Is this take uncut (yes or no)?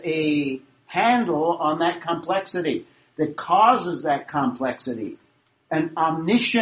yes